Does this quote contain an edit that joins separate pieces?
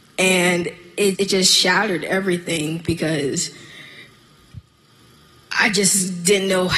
yes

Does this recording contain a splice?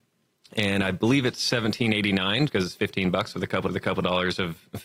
yes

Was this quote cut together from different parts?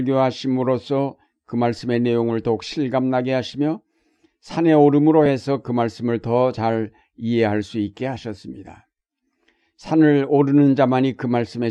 no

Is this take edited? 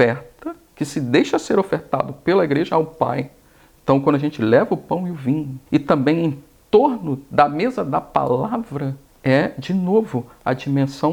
yes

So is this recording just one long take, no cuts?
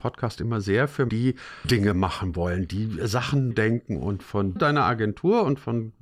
no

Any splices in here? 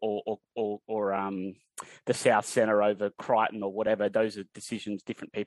no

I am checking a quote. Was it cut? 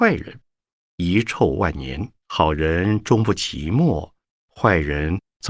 yes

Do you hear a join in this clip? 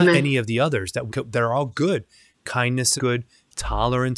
yes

